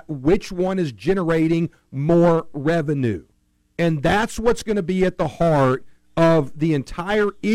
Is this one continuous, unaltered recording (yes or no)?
yes